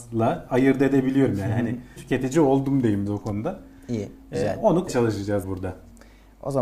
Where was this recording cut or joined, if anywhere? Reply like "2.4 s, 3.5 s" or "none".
2.0 s, 3.1 s, 4.9 s, 5.4 s